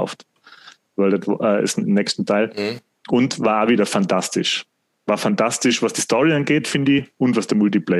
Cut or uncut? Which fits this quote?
uncut